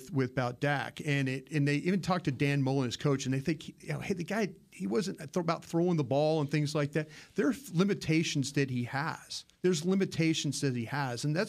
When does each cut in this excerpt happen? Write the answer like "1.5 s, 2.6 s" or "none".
9.5 s